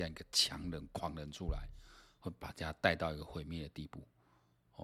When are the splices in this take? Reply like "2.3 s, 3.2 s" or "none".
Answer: none